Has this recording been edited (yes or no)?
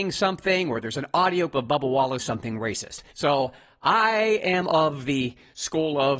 yes